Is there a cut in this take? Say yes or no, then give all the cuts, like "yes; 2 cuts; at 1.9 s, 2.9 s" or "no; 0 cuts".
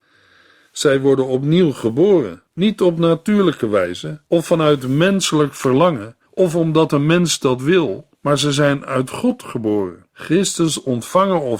yes; 5 cuts; at 2.5 s, 4.3 s, 6.3 s, 8.1 s, 10.1 s